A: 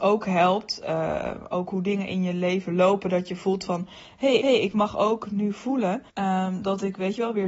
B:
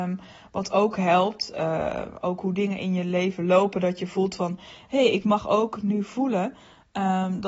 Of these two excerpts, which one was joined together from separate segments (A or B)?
A